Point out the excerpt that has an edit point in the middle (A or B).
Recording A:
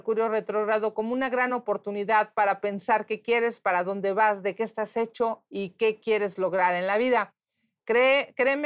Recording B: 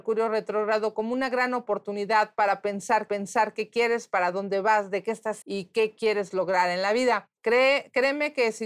B